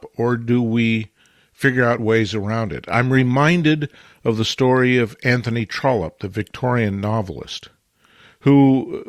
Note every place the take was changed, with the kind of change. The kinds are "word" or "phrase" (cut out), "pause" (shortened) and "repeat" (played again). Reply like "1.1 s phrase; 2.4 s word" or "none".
none